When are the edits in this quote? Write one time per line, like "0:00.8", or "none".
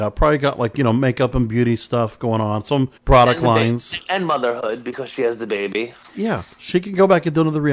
0:03.0
0:04.1
0:06.5